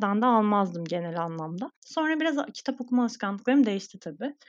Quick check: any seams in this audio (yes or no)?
yes